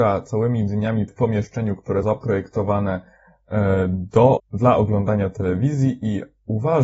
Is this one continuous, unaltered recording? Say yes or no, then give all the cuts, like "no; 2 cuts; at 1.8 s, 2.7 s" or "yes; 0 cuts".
no; 3 cuts; at 1.1 s, 2.0 s, 4.4 s